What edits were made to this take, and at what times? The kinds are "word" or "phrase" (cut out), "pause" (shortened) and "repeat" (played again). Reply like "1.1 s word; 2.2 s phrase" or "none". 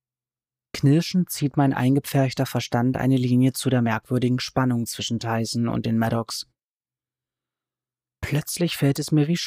none